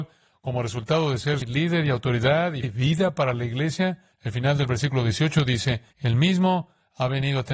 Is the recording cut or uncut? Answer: cut